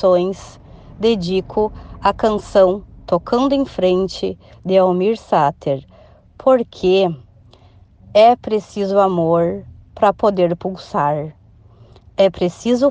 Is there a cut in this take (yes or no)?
no